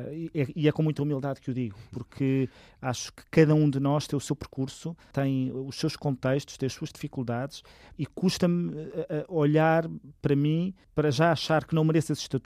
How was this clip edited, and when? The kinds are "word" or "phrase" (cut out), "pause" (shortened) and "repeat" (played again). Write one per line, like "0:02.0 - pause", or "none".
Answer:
none